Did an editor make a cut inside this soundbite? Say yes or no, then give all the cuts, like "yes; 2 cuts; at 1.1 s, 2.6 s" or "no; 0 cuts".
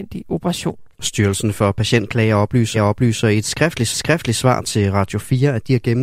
yes; 3 cuts; at 0.9 s, 2.7 s, 3.9 s